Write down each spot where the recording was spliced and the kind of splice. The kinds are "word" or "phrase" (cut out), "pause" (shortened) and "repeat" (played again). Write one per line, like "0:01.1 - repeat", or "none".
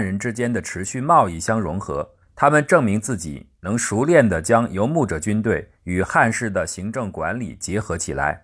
0:02.2 - pause
0:05.7 - pause